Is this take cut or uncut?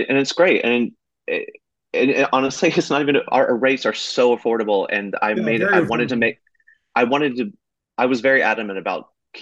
uncut